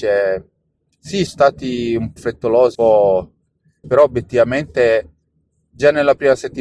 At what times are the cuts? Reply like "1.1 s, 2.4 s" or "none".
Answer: 1.3 s, 2.2 s, 2.7 s, 3.8 s

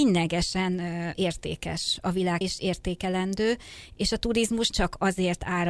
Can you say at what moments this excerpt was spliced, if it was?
1.1 s, 2.4 s, 4.7 s

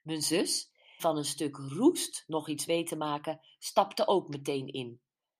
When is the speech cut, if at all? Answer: 1.0 s, 2.7 s

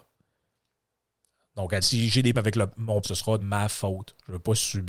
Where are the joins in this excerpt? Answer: 1.8 s, 2.3 s, 3.0 s, 3.4 s

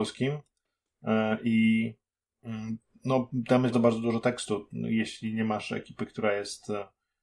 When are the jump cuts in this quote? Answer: 3.7 s

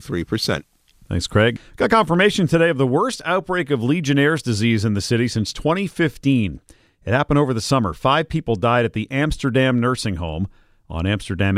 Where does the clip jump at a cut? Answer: none

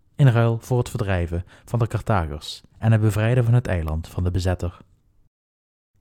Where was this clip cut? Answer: 2.7 s

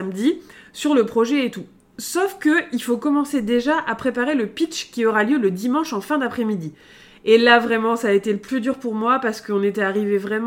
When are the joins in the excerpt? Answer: none

